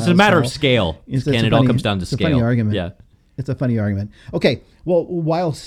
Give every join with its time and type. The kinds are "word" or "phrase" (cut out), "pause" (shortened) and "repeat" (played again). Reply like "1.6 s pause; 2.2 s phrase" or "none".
none